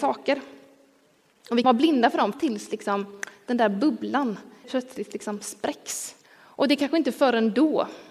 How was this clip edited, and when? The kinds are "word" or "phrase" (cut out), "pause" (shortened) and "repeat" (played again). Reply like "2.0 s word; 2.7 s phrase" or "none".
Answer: 1.6 s word; 2.3 s word; 4.6 s word; 6.2 s pause